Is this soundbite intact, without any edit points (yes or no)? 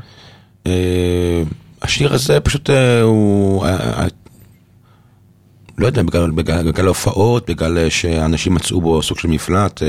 yes